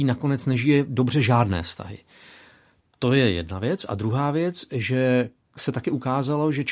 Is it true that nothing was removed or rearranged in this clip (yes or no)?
yes